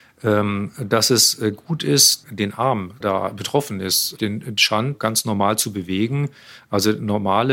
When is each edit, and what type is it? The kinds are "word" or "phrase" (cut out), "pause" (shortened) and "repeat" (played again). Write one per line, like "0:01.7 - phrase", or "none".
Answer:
0:02.2 - word
0:03.0 - word
0:04.2 - word
0:04.9 - word